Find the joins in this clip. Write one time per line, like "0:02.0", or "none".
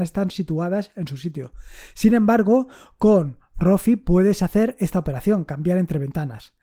none